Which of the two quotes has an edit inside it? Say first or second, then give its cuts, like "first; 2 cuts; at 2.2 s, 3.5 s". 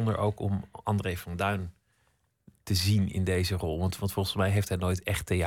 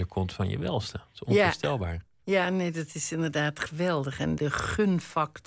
second; 1 cut; at 4.4 s